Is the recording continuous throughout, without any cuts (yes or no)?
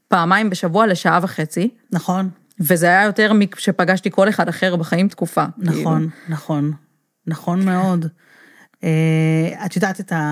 no